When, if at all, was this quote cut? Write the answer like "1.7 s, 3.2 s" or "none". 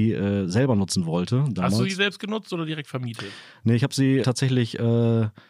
4.2 s